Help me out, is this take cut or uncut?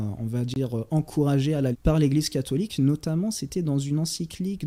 cut